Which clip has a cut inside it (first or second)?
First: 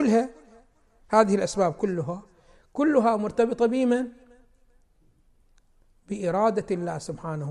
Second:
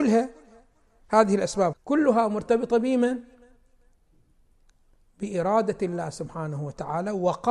second